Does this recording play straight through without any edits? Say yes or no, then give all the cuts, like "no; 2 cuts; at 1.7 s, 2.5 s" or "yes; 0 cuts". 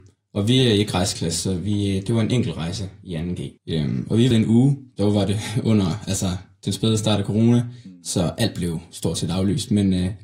no; 2 cuts; at 3.6 s, 4.3 s